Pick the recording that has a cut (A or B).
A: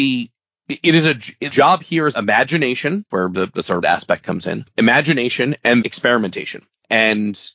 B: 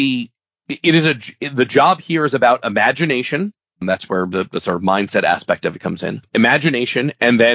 A